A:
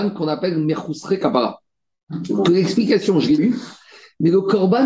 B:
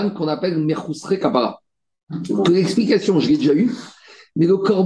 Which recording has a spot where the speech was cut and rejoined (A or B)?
A